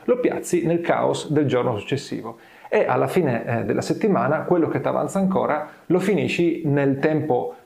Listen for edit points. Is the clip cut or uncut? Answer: uncut